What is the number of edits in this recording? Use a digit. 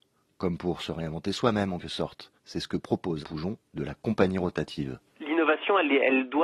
3